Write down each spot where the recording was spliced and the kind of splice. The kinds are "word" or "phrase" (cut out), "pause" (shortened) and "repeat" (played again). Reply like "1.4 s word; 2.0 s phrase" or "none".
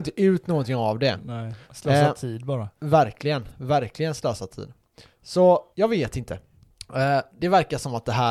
1.6 s pause; 2.7 s pause; 5.7 s pause